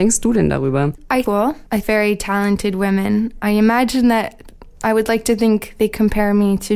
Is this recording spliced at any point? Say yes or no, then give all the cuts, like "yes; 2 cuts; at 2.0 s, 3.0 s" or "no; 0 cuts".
yes; 2 cuts; at 1.3 s, 1.8 s